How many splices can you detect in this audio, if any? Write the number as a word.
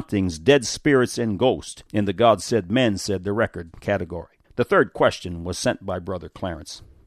two